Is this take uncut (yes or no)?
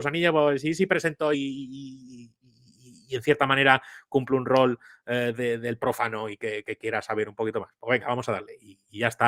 no